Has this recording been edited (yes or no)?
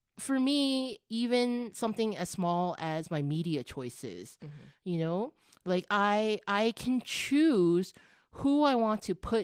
no